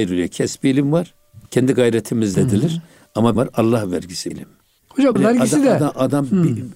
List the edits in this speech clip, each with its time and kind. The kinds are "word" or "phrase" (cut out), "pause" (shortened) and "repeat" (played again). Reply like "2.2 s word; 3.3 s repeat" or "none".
1.5 s pause; 2.3 s word; 3.4 s phrase; 4.3 s word; 5.2 s word